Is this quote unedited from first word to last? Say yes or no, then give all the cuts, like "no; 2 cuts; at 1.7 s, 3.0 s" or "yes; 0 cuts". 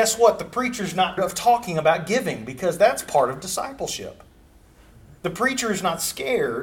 no; 2 cuts; at 1.2 s, 5.2 s